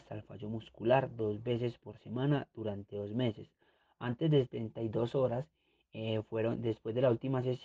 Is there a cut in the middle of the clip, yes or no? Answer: no